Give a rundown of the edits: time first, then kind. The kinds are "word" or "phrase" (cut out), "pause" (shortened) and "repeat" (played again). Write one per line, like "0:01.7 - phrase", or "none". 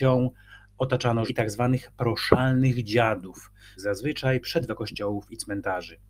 0:01.3 - word
0:03.8 - word
0:04.7 - word